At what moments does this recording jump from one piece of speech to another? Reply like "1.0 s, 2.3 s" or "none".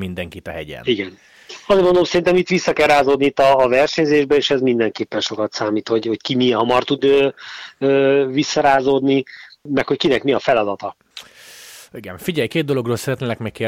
none